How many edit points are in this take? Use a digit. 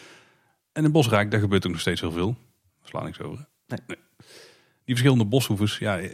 0